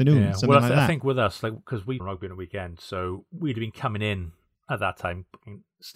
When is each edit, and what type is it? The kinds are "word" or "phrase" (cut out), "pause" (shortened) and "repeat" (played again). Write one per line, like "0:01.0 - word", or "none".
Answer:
0:02.0 - phrase